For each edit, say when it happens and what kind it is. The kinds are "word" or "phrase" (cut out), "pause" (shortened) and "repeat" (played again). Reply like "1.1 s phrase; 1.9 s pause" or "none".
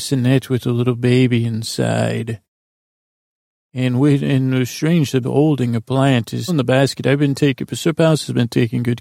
5.2 s word; 6.5 s word